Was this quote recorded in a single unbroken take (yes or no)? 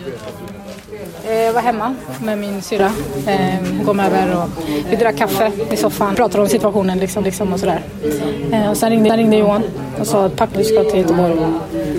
no